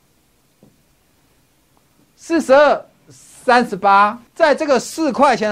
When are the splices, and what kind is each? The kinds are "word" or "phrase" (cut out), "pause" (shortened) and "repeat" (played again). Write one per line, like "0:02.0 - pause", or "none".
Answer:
0:04.3 - pause